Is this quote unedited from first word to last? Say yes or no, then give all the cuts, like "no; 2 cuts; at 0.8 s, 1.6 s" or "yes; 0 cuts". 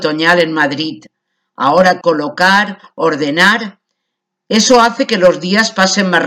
no; 1 cut; at 2.0 s